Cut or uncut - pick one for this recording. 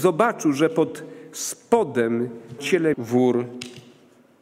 cut